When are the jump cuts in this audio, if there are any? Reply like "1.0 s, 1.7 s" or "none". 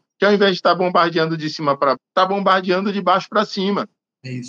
2.0 s